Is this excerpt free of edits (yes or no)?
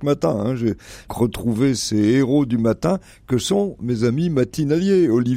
no